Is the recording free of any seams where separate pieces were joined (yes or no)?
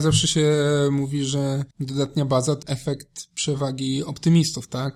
no